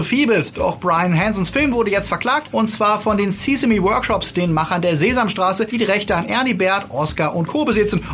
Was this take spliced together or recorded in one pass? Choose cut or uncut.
uncut